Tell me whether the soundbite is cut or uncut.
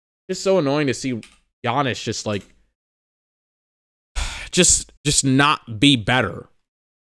cut